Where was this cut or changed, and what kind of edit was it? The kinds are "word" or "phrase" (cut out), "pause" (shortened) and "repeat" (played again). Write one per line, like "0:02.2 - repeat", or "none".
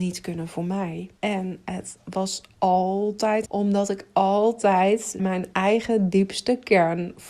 0:01.2 - pause
0:03.5 - phrase
0:05.2 - word

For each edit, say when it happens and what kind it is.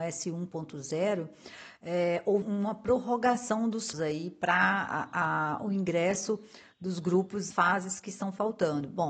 0:02.4 - word
0:03.9 - word
0:07.5 - word

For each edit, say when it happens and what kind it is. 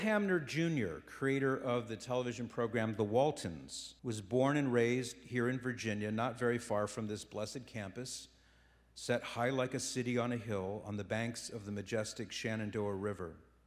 0:04.0 - pause

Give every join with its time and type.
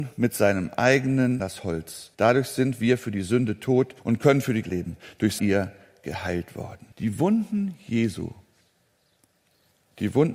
0:01.4 - phrase
0:02.1 - pause
0:04.0 - pause
0:04.6 - word
0:05.4 - phrase
0:06.9 - pause

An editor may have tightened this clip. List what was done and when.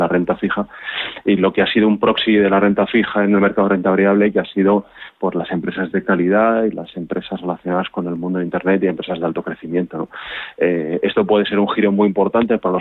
none

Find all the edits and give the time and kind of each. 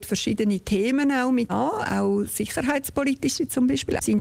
0:01.5 - word

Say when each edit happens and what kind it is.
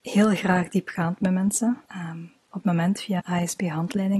0:01.9 - pause
0:02.6 - word
0:03.2 - word

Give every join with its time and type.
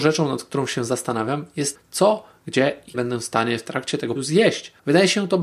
0:01.7 - word
0:02.9 - word
0:04.2 - word

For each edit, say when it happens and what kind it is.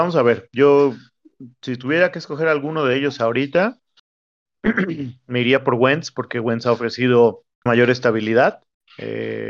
0:07.7 - word

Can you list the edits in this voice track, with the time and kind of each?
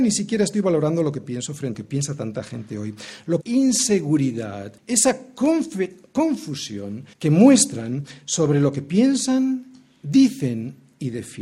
0:01.7 - phrase
0:03.4 - phrase
0:04.8 - pause
0:07.1 - pause

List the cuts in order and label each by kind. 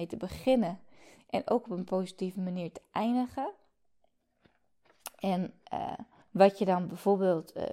0:06.2 - pause

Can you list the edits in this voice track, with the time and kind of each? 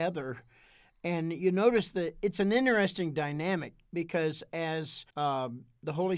0:05.1 - pause

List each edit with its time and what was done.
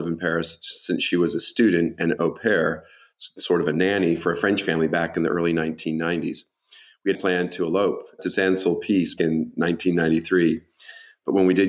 0:07.1 - word
0:08.2 - word
0:09.2 - word

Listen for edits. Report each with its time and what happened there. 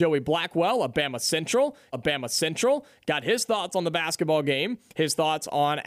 0:01.9 - repeat

